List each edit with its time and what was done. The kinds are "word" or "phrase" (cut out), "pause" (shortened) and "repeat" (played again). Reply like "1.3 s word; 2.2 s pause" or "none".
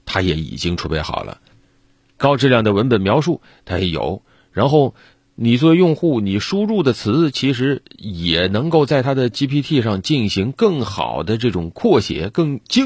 none